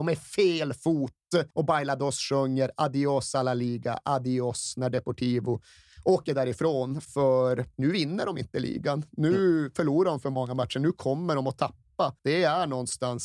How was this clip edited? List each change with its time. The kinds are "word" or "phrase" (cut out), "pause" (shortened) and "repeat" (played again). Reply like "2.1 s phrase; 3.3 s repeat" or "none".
1.5 s pause; 7.7 s pause; 12.2 s pause

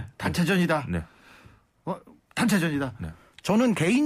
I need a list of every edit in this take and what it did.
none

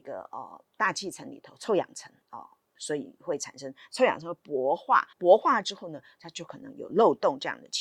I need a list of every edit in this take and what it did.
2.2 s pause; 5.1 s pause

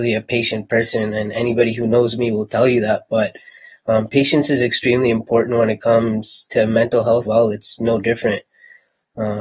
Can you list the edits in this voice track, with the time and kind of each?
7.3 s word

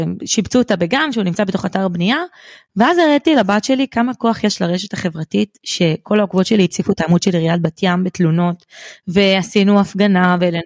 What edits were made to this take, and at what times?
none

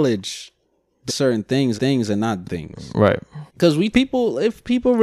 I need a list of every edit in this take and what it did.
1.1 s phrase; 1.8 s repeat; 2.4 s word; 3.5 s pause; 3.9 s phrase

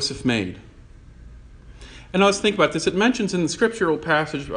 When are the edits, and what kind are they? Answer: none

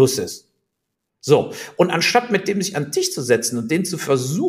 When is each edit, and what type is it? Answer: none

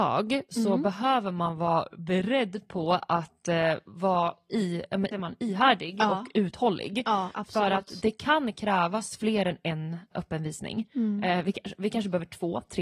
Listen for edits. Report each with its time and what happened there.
5.1 s phrase; 10.1 s word

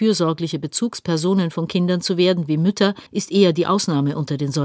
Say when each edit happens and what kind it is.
3.1 s pause

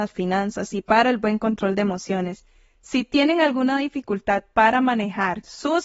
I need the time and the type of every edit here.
none

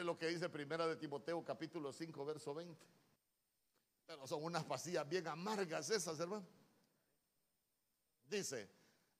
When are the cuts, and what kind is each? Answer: 3.2 s pause

